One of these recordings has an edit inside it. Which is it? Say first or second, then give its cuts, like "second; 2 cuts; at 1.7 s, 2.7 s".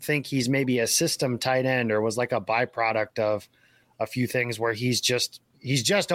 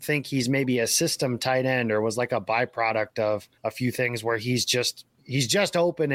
second; 1 cut; at 3.6 s